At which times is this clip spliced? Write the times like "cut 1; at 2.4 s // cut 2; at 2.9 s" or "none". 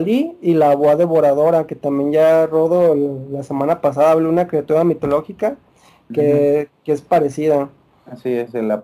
none